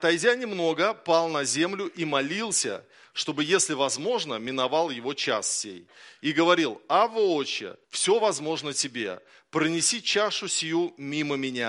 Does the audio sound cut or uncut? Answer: cut